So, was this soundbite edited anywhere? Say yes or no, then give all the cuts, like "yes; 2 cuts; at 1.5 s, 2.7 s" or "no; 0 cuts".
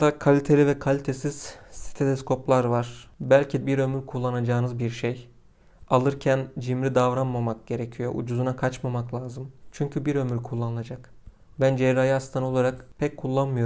yes; 1 cut; at 3.6 s